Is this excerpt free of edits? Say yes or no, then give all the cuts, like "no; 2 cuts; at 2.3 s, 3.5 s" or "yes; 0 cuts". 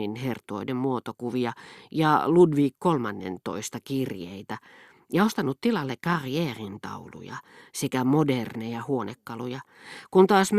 yes; 0 cuts